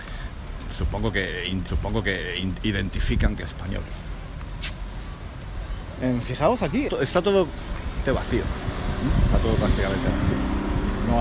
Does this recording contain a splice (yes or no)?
yes